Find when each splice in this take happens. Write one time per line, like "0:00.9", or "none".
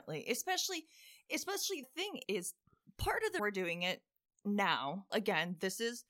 0:01.8
0:02.2
0:03.4
0:05.1